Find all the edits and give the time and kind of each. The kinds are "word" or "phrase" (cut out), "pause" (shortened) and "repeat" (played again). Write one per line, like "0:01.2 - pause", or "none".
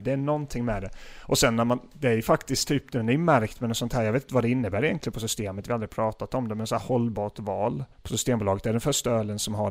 0:07.9 - pause